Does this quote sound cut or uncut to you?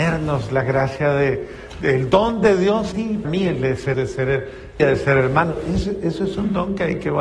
cut